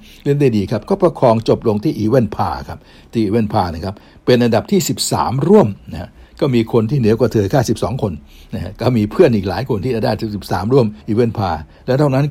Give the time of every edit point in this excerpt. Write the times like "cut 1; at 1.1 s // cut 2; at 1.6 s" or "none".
cut 1; at 11.0 s